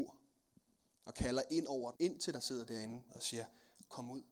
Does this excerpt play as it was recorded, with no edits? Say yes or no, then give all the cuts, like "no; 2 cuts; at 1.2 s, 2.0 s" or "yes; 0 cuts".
no; 3 cuts; at 1.9 s, 2.3 s, 3.1 s